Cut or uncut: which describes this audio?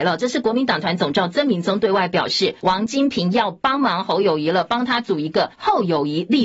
cut